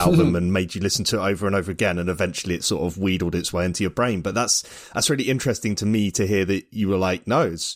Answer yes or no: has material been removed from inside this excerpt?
no